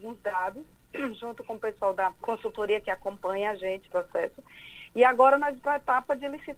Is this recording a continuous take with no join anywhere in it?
no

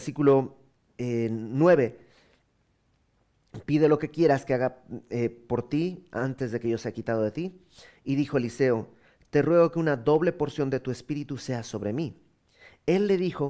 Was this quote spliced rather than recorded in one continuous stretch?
no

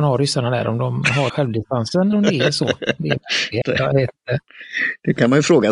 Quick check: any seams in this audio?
yes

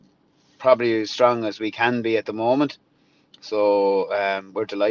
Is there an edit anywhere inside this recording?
no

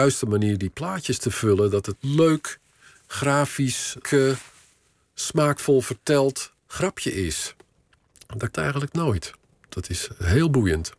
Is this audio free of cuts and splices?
no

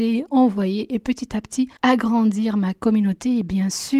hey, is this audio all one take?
no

